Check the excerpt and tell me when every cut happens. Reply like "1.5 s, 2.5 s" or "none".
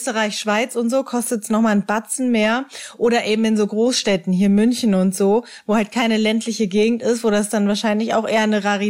none